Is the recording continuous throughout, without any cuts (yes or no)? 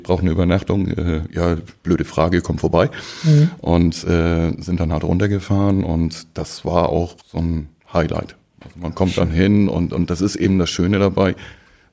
no